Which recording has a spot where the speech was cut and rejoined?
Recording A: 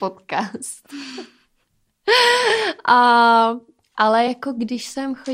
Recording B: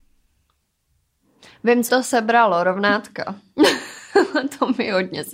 B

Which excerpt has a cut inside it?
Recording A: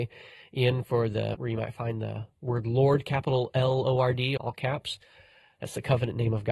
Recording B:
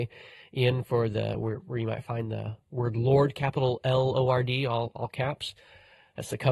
A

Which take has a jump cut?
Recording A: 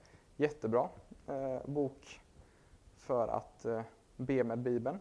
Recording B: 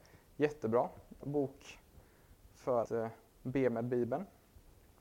B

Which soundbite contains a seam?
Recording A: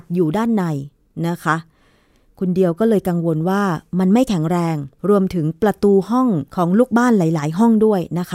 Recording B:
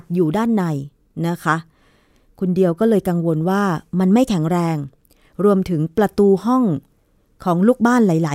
A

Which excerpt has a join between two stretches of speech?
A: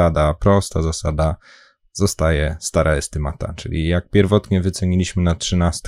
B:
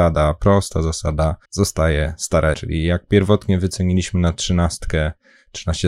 B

